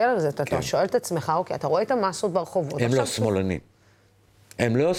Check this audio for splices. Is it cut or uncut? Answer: uncut